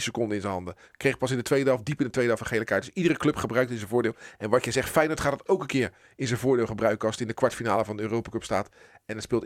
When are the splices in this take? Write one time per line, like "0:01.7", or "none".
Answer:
none